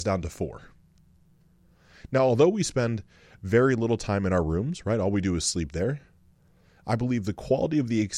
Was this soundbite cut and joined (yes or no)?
no